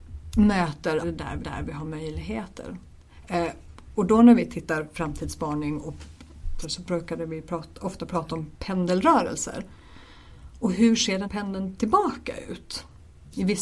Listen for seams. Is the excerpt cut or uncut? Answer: cut